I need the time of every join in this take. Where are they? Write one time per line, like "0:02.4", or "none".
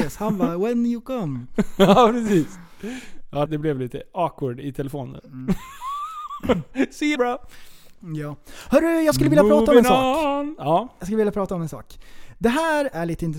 0:03.5
0:07.2